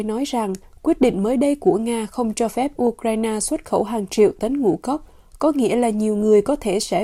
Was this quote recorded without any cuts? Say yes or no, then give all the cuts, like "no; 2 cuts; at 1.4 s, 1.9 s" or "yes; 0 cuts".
yes; 0 cuts